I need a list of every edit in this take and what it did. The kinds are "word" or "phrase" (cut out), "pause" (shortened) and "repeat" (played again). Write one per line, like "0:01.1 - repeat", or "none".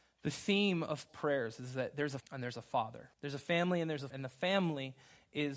0:01.1 - word
0:02.2 - word
0:03.1 - pause
0:04.1 - word